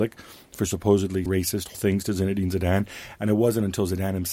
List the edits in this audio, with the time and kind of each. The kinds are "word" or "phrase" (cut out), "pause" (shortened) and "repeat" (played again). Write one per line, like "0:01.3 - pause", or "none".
0:01.3 - word
0:01.7 - word